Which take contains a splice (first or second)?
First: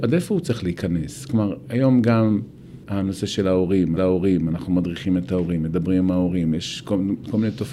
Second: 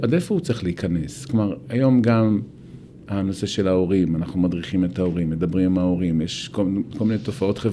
first